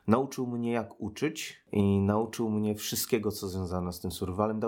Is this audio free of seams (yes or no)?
yes